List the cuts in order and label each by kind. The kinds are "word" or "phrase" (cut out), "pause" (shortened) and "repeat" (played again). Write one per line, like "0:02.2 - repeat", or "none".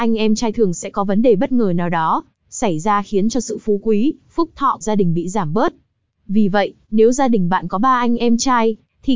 0:04.8 - word